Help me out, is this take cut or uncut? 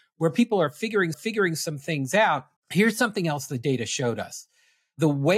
cut